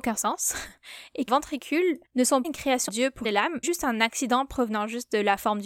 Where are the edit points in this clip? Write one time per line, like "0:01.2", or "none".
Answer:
0:01.3
0:02.1
0:02.4
0:02.9
0:03.2
0:03.6